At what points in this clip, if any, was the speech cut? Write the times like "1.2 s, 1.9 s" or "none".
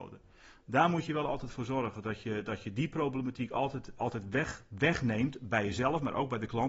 4.0 s